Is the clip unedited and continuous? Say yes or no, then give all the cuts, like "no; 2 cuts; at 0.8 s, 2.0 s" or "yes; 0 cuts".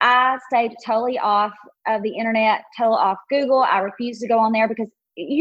yes; 0 cuts